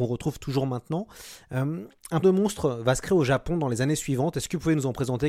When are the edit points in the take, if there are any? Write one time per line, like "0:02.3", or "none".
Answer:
0:02.2